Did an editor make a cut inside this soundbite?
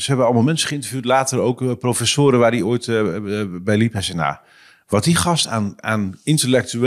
no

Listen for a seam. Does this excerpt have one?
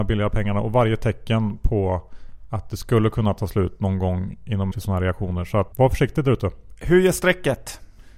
yes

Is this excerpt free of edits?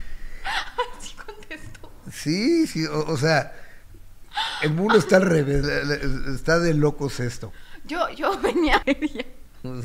no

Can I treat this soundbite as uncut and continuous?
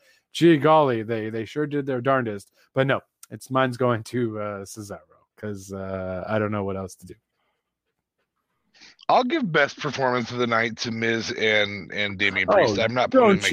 yes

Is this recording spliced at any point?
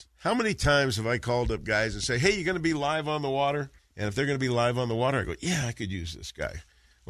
yes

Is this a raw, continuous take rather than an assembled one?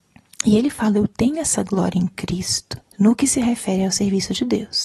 no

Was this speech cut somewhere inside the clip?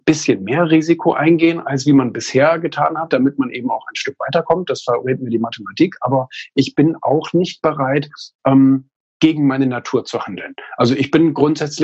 no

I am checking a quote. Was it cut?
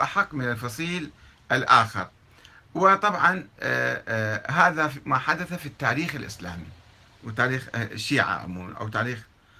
no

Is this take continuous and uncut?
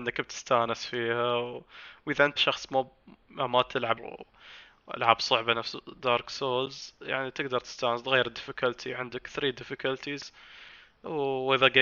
no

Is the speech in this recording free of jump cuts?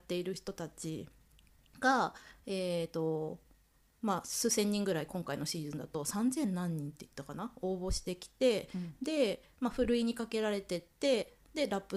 yes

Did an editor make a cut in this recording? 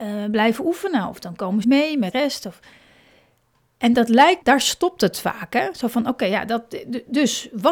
yes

